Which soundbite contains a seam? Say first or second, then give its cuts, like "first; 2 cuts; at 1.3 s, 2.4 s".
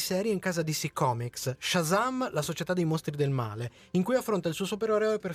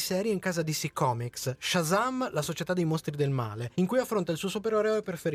second; 1 cut; at 3.7 s